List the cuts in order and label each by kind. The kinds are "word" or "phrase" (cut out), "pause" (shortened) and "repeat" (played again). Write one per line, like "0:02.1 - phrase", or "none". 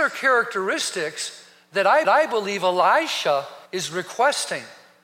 0:02.0 - repeat
0:03.7 - pause